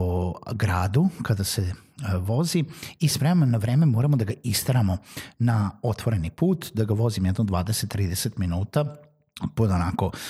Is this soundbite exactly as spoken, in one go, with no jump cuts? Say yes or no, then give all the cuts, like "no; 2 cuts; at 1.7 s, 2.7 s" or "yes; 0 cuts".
yes; 0 cuts